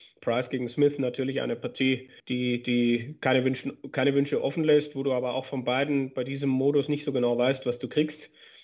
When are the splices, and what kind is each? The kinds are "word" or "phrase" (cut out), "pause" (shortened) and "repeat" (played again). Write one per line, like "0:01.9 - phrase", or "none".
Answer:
0:02.2 - pause